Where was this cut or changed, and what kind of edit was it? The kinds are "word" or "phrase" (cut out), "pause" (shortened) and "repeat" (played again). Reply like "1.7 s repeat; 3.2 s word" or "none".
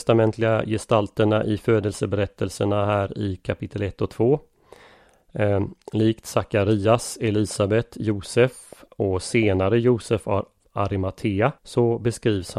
11.6 s pause